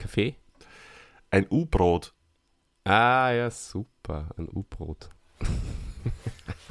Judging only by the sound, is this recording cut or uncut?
uncut